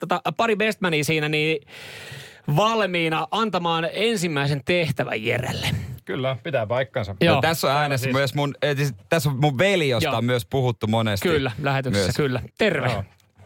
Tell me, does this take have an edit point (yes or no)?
yes